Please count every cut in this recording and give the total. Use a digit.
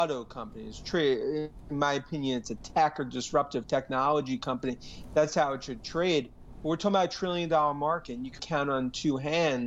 1